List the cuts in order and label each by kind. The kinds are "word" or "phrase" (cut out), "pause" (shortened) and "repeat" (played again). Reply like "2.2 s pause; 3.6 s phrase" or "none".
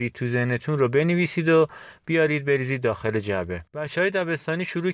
3.7 s pause